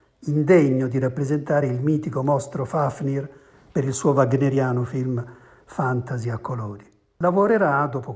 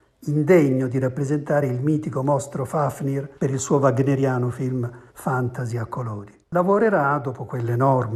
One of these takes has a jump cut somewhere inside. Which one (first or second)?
second